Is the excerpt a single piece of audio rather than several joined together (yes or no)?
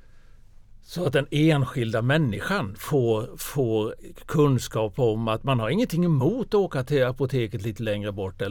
yes